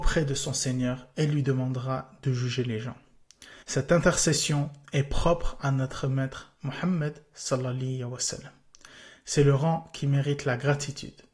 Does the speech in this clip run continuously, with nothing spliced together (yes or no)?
no